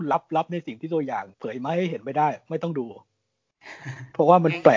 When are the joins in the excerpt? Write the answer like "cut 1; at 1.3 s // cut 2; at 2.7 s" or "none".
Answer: cut 1; at 1.3 s